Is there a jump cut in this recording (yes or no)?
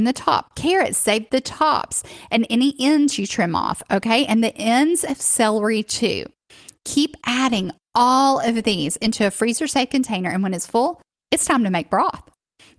no